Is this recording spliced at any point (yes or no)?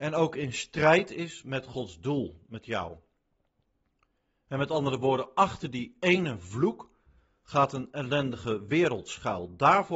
no